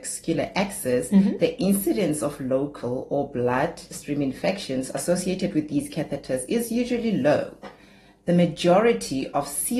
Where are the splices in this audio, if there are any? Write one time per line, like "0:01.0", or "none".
none